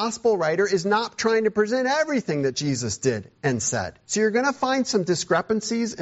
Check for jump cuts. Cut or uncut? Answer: cut